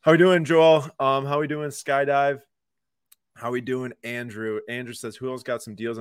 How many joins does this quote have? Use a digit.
0